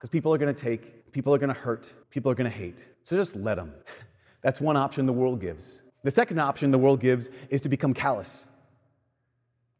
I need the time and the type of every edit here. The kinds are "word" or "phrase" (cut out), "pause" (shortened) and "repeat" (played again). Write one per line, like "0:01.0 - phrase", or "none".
0:01.0 - pause
0:02.0 - pause
0:02.9 - pause
0:03.8 - pause
0:05.9 - pause